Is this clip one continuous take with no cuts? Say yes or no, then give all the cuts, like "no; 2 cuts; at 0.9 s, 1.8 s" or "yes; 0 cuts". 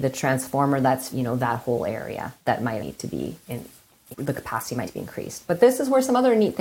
no; 5 cuts; at 1.1 s, 2.8 s, 3.5 s, 4.1 s, 4.8 s